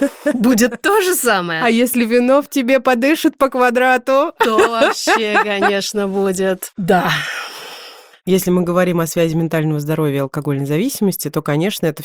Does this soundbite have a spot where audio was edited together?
no; 0 cuts

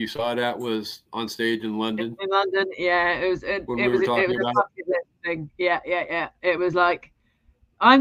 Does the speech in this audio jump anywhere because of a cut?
no; 0 cuts

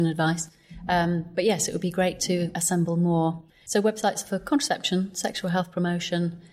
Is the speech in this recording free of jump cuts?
yes; 0 cuts

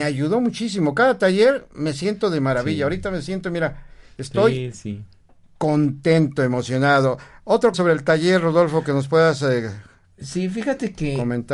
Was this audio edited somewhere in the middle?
yes; 2 cuts; at 4.7 s, 7.7 s

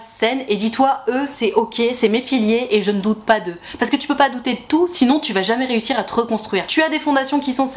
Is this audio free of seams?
yes; 0 cuts

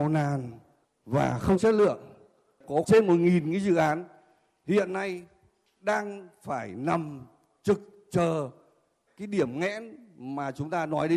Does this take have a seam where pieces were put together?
yes; 2 cuts; at 1.6 s, 2.8 s

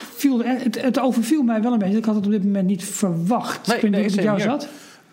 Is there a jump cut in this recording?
no; 0 cuts

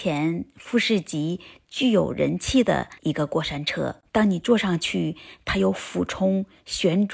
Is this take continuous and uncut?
no; 1 cut; at 3.0 s

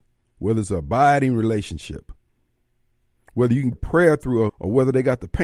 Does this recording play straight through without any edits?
no; 2 cuts; at 3.7 s, 4.5 s

